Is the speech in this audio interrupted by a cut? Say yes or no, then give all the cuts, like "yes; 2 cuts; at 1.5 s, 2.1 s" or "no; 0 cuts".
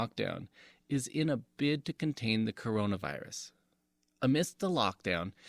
no; 0 cuts